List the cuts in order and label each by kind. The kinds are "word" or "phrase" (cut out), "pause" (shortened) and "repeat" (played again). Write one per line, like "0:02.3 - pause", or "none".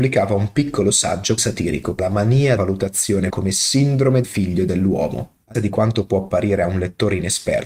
0:01.4 - word
0:02.0 - word
0:02.6 - word
0:03.3 - word
0:04.2 - word
0:05.5 - word